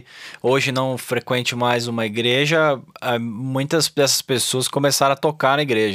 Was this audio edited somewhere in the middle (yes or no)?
no